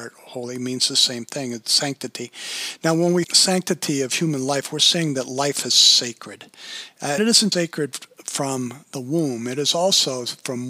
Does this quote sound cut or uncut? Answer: cut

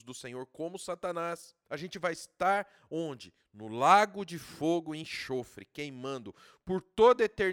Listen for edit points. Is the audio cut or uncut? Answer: uncut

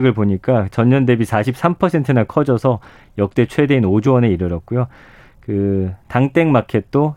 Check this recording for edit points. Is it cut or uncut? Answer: uncut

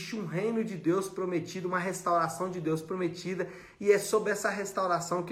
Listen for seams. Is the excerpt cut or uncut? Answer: uncut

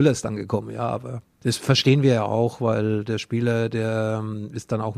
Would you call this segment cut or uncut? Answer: uncut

